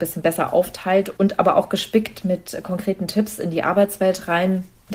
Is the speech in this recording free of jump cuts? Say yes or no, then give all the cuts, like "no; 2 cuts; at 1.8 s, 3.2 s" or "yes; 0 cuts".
yes; 0 cuts